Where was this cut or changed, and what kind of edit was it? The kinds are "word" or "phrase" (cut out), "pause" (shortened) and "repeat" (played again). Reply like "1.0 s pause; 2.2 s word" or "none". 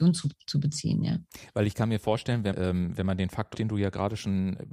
2.5 s word; 3.5 s word

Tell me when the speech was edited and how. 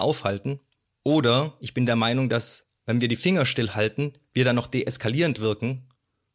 2.7 s pause

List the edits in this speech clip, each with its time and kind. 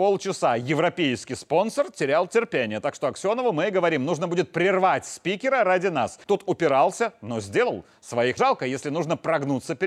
6.2 s pause; 8.4 s word

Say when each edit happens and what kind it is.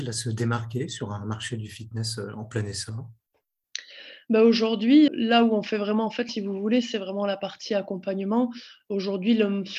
5.1 s word; 6.3 s phrase

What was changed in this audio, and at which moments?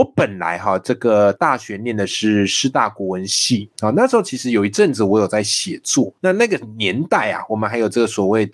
6.2 s pause

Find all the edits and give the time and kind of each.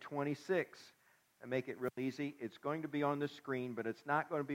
none

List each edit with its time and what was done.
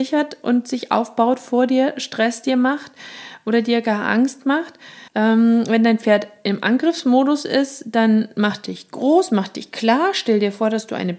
5.1 s pause

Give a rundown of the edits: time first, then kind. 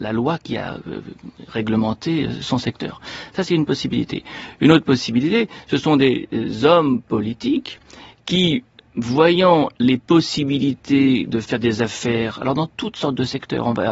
none

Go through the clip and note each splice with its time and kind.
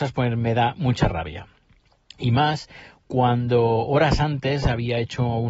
none

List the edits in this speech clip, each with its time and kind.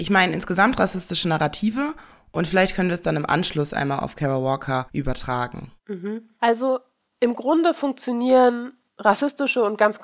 none

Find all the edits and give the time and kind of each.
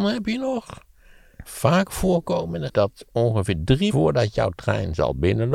1.4 s word; 2.7 s word; 3.9 s word

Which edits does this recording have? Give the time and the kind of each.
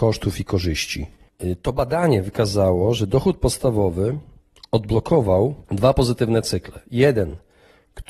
5.6 s pause

